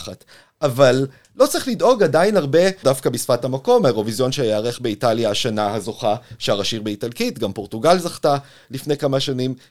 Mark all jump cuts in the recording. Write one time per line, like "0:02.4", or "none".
0:02.8